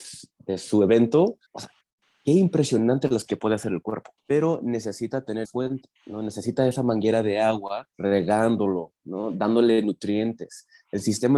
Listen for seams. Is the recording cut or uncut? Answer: cut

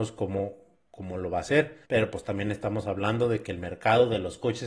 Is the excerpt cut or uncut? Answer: cut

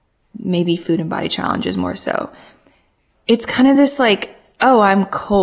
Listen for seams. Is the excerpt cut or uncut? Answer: uncut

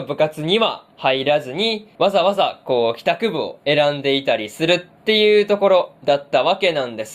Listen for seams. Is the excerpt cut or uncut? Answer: cut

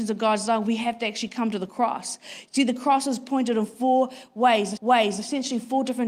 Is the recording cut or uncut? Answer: cut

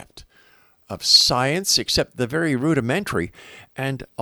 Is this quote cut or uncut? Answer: uncut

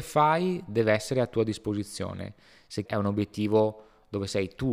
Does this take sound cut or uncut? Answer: cut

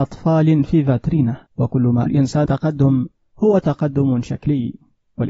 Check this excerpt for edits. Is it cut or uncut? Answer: cut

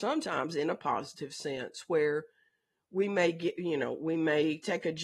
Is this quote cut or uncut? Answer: uncut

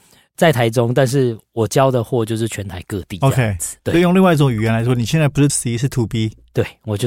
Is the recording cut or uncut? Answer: cut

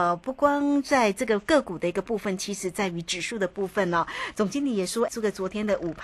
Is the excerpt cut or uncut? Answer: cut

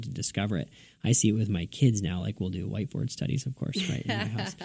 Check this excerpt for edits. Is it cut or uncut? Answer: uncut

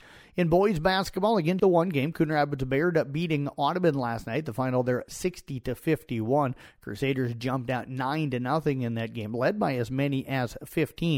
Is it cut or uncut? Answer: cut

